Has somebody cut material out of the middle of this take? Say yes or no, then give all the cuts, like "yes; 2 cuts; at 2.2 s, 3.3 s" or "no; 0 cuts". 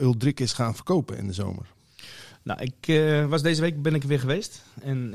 no; 0 cuts